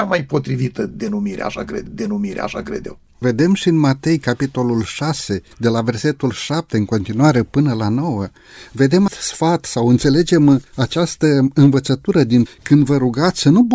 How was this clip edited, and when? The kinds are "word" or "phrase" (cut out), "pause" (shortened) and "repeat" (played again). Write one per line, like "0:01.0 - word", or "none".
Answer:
0:01.9 - repeat
0:05.5 - pause
0:09.1 - word
0:10.7 - pause
0:12.5 - phrase